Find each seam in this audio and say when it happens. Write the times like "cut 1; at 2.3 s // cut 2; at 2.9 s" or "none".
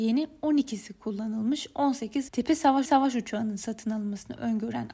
cut 1; at 2.3 s // cut 2; at 2.8 s